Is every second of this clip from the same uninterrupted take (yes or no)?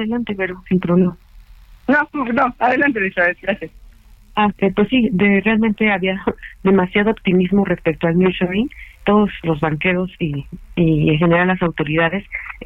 no